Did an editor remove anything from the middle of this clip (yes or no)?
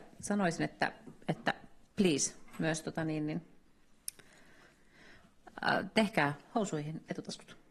no